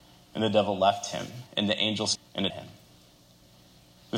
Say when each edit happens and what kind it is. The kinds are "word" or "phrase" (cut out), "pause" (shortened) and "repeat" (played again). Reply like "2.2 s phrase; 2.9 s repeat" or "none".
1.5 s pause; 2.2 s word; 2.5 s word